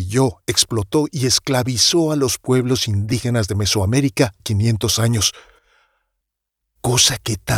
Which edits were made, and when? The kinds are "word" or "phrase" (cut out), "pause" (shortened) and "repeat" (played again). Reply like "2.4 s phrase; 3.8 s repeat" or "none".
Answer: 4.4 s word